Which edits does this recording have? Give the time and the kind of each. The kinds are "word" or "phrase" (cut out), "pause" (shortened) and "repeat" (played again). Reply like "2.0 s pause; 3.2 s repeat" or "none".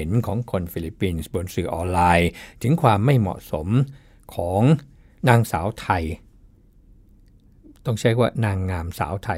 none